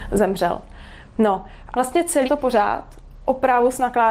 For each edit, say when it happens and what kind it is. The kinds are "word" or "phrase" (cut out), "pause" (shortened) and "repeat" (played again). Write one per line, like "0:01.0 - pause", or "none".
0:01.7 - word
0:02.2 - word

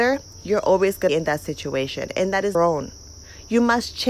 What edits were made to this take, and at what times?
0:01.1 - phrase
0:02.5 - phrase

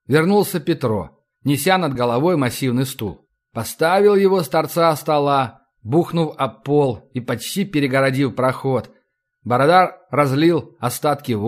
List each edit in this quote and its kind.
none

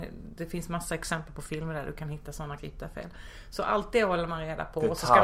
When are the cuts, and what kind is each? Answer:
0:02.6 - word

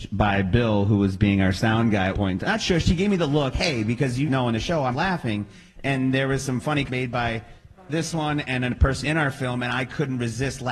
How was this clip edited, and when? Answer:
0:02.1 - word
0:03.5 - word
0:04.2 - word
0:04.9 - word
0:06.9 - word
0:09.0 - word

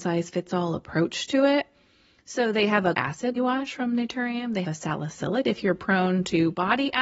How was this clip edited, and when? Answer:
0:02.9 - word
0:03.4 - word
0:04.6 - word
0:05.4 - word

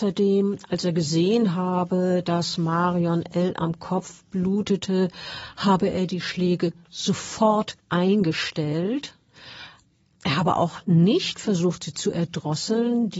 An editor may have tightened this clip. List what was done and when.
0:07.8 - pause

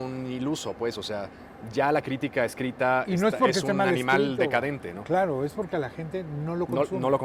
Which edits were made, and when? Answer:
none

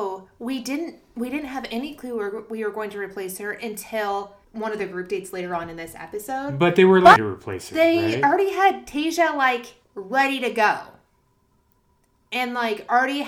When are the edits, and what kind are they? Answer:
0:04.4 - pause
0:07.2 - phrase
0:09.8 - pause

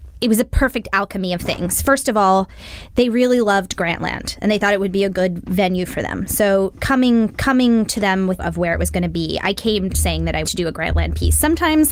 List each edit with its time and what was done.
0:07.3 - repeat
0:08.4 - phrase
0:10.4 - word

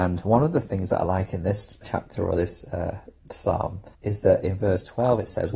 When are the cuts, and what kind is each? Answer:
0:01.8 - word
0:03.9 - pause

